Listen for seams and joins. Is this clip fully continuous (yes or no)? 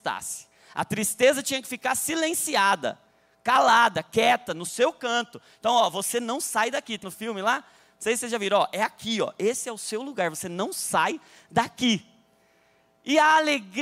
no